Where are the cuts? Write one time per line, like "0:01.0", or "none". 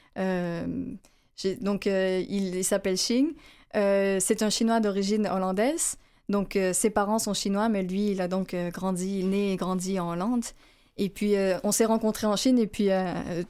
none